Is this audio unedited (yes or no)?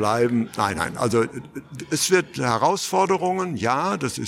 yes